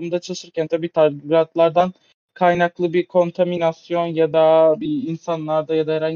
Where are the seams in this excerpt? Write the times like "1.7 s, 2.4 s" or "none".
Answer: none